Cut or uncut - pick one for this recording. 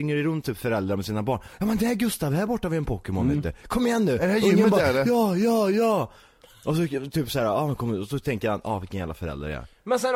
uncut